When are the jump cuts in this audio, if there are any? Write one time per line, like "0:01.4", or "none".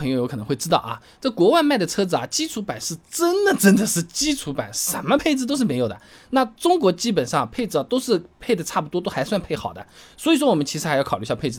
0:03.0